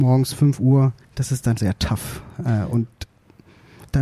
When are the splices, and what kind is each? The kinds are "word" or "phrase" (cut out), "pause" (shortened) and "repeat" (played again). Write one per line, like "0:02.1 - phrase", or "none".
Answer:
0:01.0 - pause
0:01.6 - word